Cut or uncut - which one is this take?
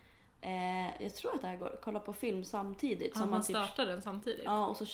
uncut